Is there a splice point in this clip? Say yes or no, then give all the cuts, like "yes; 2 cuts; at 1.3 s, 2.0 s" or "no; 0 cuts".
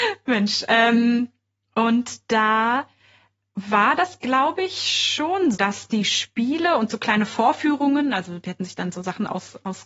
yes; 1 cut; at 5.5 s